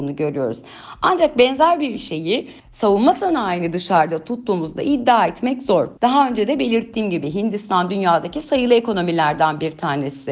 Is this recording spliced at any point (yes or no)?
yes